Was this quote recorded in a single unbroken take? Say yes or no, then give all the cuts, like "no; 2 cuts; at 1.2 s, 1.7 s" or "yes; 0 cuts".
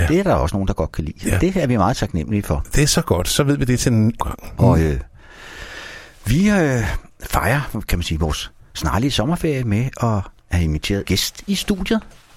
no; 4 cuts; at 4.2 s, 7.1 s, 10.4 s, 11.0 s